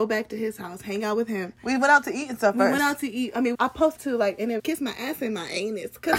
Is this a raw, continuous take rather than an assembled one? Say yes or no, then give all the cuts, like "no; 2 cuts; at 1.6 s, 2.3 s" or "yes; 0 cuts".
no; 3 cuts; at 3.5 s, 4.0 s, 4.6 s